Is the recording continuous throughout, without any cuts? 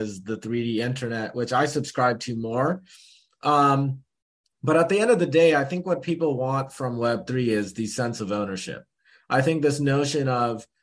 yes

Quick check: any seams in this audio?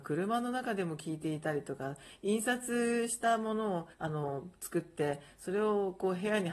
yes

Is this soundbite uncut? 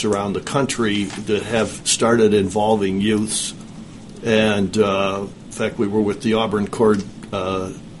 yes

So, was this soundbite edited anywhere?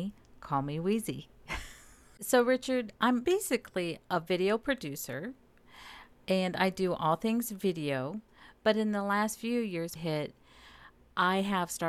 yes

